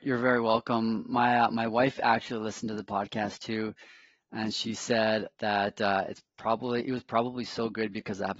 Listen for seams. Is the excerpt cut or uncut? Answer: uncut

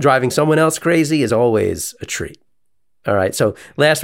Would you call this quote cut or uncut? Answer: uncut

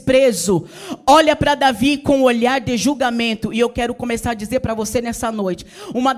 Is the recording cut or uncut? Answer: uncut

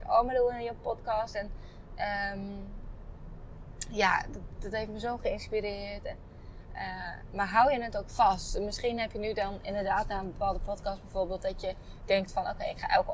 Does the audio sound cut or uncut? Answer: uncut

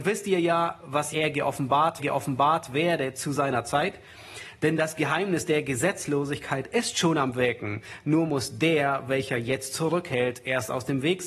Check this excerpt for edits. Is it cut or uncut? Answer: cut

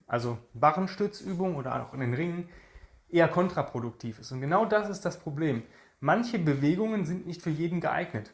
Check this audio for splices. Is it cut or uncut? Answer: uncut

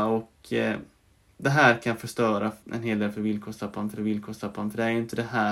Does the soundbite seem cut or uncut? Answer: cut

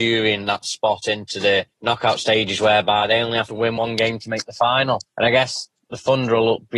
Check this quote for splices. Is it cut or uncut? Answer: cut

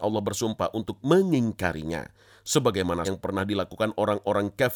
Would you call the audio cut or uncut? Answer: cut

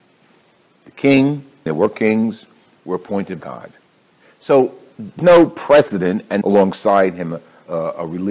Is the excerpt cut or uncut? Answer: cut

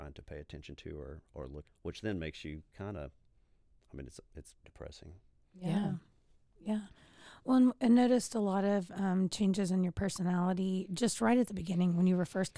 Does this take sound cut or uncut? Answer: cut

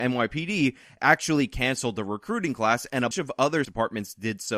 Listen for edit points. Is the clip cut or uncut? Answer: cut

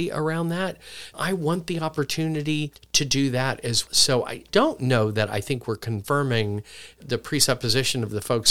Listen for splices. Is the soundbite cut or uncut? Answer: cut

